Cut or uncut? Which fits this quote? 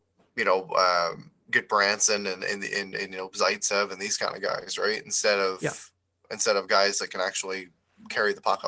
uncut